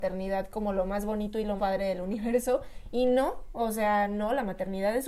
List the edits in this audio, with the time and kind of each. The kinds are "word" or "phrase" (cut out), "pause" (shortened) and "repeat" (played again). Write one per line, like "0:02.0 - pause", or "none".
0:01.6 - word

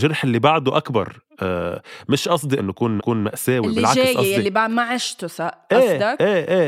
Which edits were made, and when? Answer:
0:02.6 - word
0:03.0 - repeat

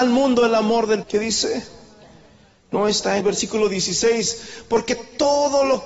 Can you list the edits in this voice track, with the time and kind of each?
0:01.0 - word
0:03.2 - word

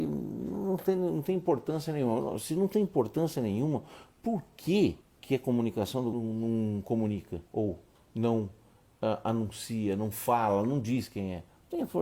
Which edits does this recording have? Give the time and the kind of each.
0:05.0 - pause
0:06.1 - phrase
0:07.5 - pause

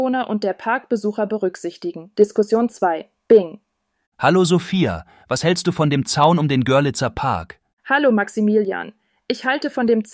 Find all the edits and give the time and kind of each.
0:02.1 - pause
0:03.2 - pause

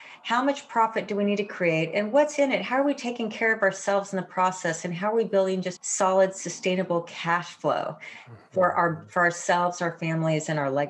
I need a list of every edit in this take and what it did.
0:05.8 - phrase

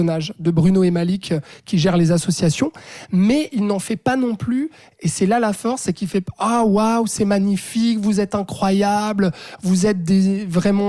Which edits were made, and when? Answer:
none

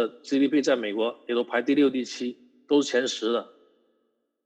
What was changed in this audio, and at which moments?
none

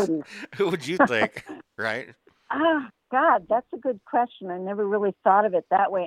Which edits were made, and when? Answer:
none

